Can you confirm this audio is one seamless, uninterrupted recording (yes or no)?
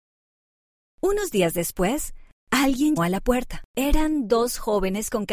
no